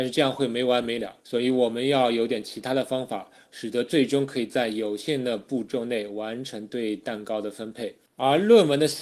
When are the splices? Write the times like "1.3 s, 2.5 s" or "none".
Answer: 1.2 s, 8.1 s